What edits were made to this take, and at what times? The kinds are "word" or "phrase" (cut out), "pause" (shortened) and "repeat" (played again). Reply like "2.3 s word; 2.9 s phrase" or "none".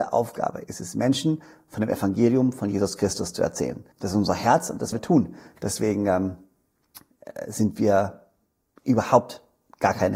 3.9 s pause; 4.9 s word